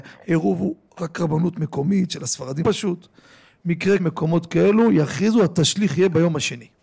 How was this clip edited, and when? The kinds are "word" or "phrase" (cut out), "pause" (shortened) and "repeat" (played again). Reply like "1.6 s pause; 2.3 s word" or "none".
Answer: 2.6 s word; 4.0 s word